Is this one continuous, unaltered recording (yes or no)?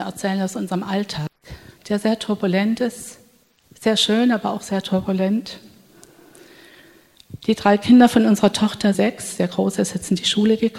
no